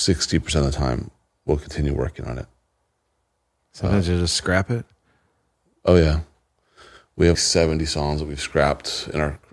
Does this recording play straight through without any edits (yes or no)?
no